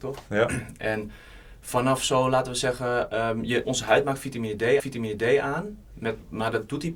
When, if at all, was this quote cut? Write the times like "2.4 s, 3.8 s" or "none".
3.6 s, 4.8 s